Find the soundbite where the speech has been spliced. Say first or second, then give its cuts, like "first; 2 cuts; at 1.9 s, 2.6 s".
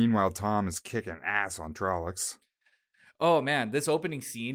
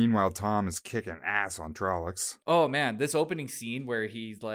second; 1 cut; at 2.4 s